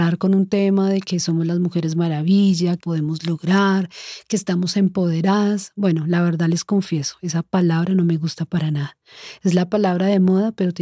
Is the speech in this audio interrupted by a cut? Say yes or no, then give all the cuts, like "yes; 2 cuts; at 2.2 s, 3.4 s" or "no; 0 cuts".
yes; 1 cut; at 2.8 s